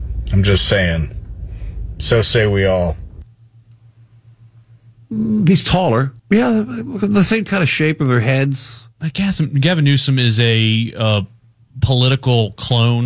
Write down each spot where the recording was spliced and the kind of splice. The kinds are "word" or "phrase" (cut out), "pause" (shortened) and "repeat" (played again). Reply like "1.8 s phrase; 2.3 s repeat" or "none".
6.2 s pause